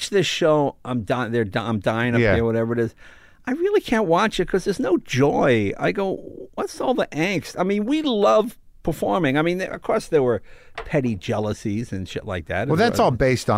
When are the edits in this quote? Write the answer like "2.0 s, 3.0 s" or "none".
none